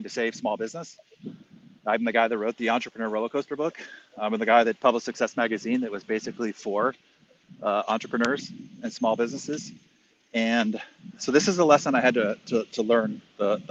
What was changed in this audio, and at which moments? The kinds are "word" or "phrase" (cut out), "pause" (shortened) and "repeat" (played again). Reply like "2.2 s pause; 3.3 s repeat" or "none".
none